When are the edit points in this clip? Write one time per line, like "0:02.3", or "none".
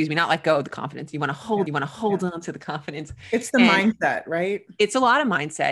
0:01.7